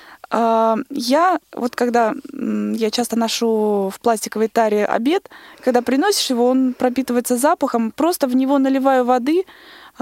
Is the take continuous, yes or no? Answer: yes